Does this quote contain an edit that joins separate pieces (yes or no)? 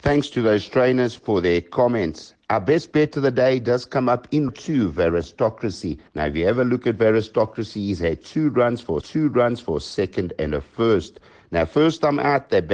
yes